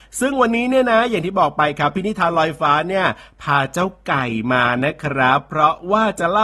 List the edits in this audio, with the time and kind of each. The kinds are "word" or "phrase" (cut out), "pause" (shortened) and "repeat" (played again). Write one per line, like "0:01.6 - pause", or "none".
none